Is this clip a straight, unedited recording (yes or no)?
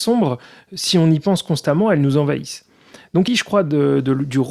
no